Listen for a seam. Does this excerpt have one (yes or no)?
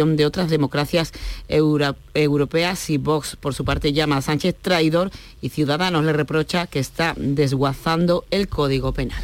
no